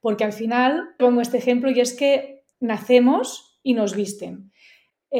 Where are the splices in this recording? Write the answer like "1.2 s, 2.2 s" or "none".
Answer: 1.0 s, 2.5 s

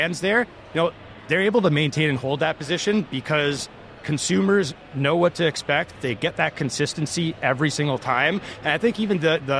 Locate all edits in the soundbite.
none

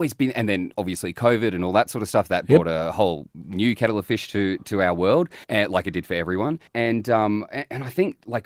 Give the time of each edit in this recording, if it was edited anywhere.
5.4 s, 6.7 s

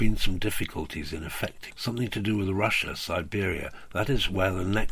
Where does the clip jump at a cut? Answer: 1.7 s

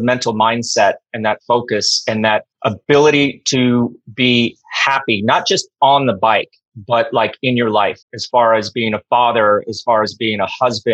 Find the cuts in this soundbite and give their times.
2.5 s, 8.0 s

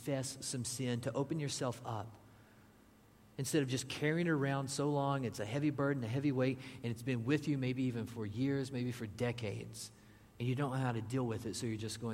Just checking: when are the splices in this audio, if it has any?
none

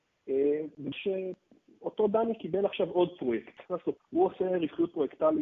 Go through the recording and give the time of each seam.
0.9 s, 3.6 s, 4.0 s

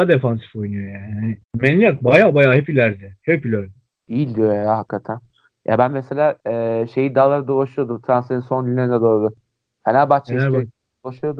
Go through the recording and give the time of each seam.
1.4 s, 6.4 s

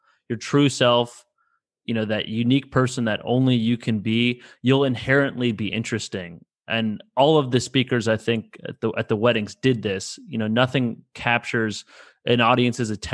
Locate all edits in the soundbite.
none

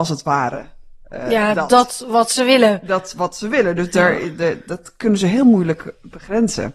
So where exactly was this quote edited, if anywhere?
none

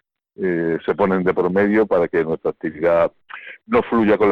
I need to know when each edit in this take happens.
none

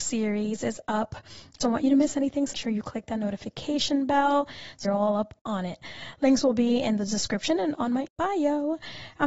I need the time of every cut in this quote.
1.6 s, 2.5 s, 4.8 s, 7.7 s, 8.1 s

